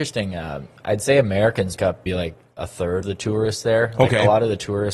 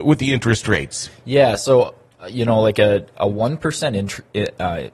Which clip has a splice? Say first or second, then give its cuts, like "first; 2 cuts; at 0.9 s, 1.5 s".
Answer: first; 3 cuts; at 1.8 s, 2.1 s, 3.0 s